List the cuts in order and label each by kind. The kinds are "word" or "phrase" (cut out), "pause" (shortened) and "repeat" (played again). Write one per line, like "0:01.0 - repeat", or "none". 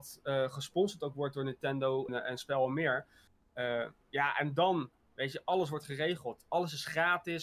0:02.1 - word